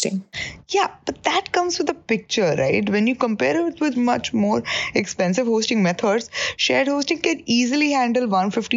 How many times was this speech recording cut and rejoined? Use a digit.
1